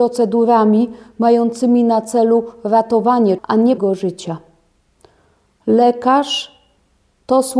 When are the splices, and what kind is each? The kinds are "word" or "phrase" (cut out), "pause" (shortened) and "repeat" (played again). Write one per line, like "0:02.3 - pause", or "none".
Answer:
0:03.4 - word
0:03.8 - word